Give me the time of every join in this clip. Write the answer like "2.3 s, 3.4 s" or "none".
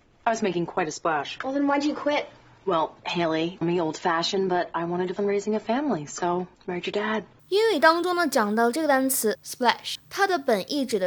3.6 s, 5.2 s, 6.5 s, 7.4 s